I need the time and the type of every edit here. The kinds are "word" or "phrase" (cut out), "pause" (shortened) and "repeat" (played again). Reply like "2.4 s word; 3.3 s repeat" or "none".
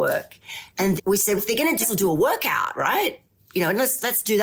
1.0 s word; 1.4 s word; 1.8 s phrase; 3.4 s pause